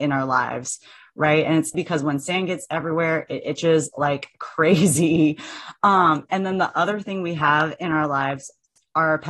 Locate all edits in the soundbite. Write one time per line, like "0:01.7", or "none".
0:01.7